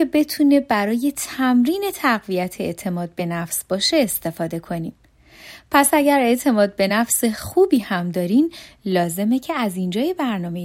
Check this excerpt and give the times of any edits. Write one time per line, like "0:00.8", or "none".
none